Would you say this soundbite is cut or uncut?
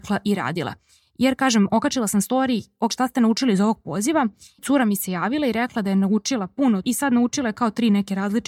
cut